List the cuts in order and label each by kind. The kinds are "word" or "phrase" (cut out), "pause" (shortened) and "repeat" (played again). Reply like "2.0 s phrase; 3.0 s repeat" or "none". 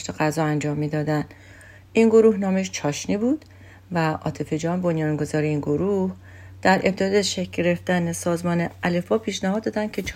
none